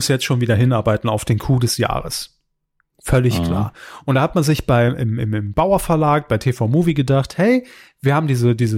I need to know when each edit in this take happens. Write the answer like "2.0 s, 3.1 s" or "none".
none